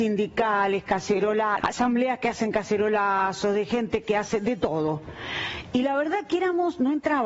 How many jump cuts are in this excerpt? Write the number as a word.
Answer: one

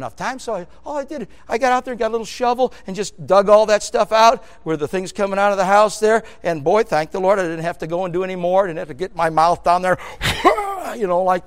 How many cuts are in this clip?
zero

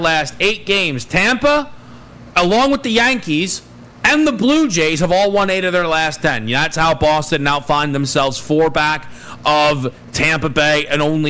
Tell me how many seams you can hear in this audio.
zero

